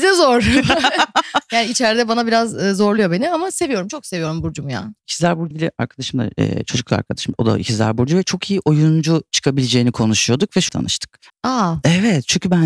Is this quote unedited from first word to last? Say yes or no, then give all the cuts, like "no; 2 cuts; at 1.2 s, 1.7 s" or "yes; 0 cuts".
no; 4 cuts; at 5.0 s, 5.5 s, 10.7 s, 11.3 s